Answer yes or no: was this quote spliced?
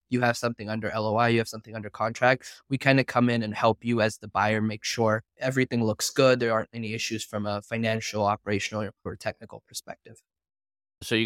no